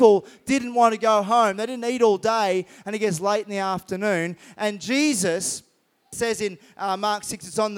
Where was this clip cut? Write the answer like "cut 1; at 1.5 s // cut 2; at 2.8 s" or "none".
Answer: none